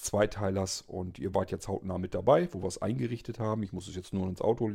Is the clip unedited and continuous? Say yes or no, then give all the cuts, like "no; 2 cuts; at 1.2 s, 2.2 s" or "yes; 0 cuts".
yes; 0 cuts